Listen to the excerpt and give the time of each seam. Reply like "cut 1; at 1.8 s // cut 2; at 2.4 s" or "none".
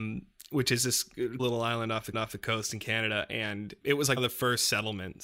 cut 1; at 1.4 s // cut 2; at 2.1 s // cut 3; at 3.8 s // cut 4; at 4.2 s